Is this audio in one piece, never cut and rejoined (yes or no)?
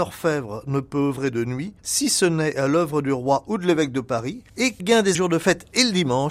no